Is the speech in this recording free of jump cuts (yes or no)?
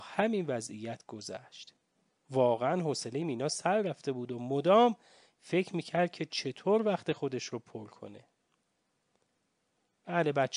yes